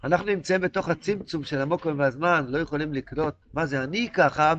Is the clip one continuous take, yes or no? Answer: no